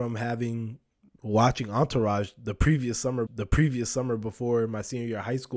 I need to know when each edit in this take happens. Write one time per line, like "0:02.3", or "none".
0:03.3